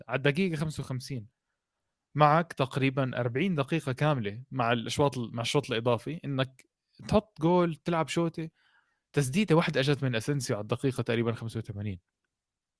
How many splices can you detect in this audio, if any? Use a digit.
0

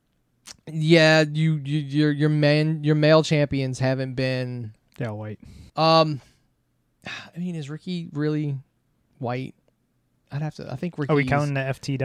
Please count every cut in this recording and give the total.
2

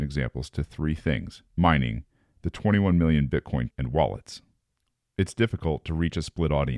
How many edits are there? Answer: 2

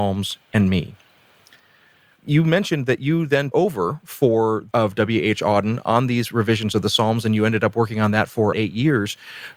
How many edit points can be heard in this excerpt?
3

